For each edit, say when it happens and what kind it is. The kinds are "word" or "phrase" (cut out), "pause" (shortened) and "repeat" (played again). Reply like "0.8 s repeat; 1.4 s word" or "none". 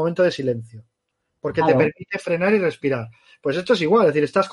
none